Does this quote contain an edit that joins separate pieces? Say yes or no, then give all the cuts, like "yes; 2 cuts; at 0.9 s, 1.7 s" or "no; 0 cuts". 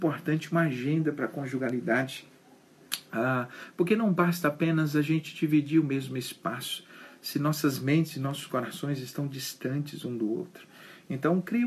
no; 0 cuts